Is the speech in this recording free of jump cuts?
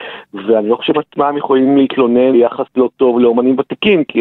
no; 2 cuts; at 0.9 s, 2.3 s

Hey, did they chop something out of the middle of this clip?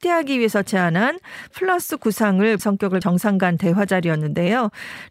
yes; 3 cuts; at 1.5 s, 2.6 s, 3.0 s

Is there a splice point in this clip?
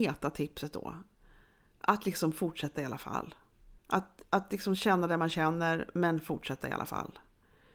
yes; 1 cut; at 3.8 s

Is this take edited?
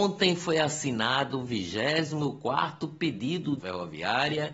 yes; 1 cut; at 3.6 s

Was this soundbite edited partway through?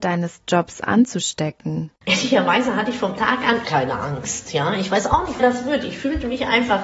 yes; 4 cuts; at 2.0 s, 3.2 s, 3.6 s, 5.4 s

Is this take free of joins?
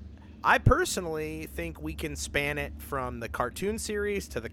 yes; 0 cuts

